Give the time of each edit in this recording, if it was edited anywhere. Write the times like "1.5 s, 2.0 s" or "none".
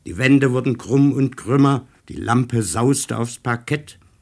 2.0 s